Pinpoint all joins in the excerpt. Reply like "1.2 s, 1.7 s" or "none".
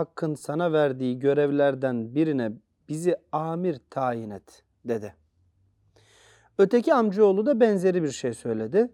none